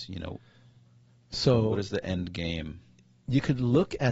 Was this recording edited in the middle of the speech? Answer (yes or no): no